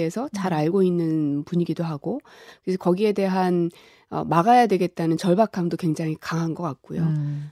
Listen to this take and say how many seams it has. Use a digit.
0